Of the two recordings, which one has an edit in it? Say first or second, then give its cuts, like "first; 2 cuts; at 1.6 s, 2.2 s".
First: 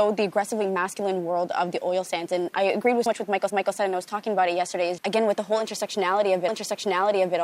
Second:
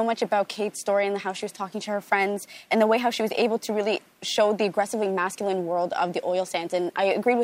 first; 4 cuts; at 3.1 s, 3.5 s, 5.0 s, 6.5 s